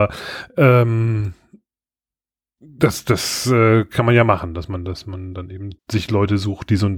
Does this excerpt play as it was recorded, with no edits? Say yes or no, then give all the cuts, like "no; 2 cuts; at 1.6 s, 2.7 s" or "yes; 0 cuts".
no; 1 cut; at 5.8 s